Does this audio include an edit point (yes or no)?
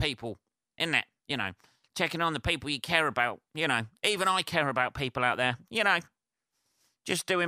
no